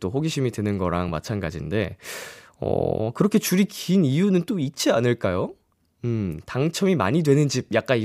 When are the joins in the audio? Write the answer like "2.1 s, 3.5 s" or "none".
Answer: none